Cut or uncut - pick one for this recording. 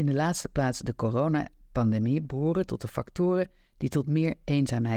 uncut